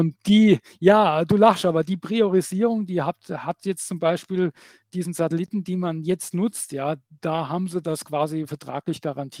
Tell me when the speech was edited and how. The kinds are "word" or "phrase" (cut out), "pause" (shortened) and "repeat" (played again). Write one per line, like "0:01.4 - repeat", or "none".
none